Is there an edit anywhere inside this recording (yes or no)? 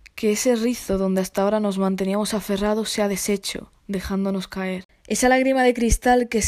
no